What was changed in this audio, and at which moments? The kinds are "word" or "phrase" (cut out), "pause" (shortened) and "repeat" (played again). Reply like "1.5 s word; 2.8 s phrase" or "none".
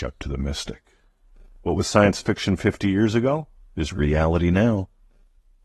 none